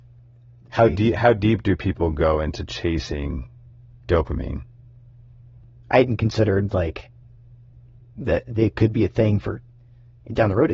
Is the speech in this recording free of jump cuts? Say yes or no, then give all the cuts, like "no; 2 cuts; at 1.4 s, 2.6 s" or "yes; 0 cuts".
yes; 0 cuts